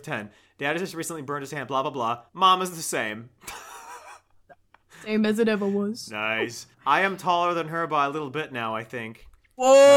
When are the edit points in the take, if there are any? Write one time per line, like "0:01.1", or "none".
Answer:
0:02.3
0:06.7